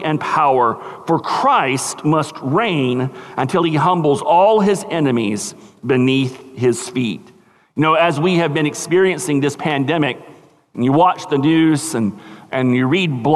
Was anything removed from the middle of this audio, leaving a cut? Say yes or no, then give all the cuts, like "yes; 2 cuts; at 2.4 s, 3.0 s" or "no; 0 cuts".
no; 0 cuts